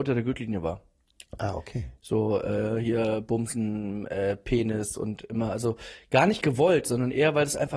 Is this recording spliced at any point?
no; 0 cuts

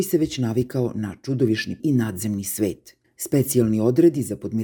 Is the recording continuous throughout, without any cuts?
no; 2 cuts; at 1.8 s, 3.0 s

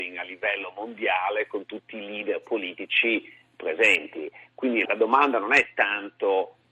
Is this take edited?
yes; 1 cut; at 4.8 s

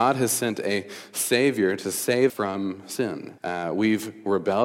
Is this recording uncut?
no; 2 cuts; at 2.3 s, 3.4 s

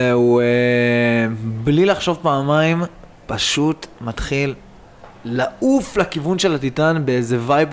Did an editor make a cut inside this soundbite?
no; 0 cuts

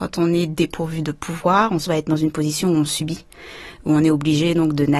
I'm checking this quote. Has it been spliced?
yes; 1 cut; at 1.9 s

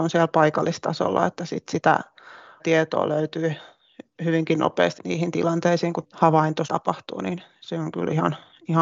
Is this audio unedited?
no; 4 cuts; at 2.6 s, 5.0 s, 6.0 s, 6.7 s

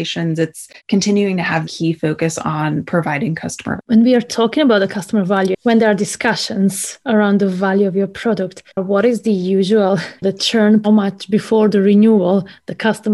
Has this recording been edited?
yes; 6 cuts; at 1.6 s, 3.8 s, 7.0 s, 8.7 s, 10.2 s, 10.8 s

